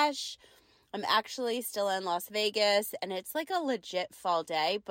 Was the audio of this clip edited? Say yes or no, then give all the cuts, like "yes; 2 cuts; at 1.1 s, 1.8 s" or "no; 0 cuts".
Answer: no; 0 cuts